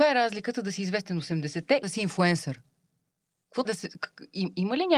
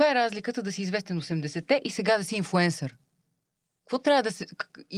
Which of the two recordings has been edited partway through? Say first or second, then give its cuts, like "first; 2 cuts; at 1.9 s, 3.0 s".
first; 2 cuts; at 1.8 s, 3.6 s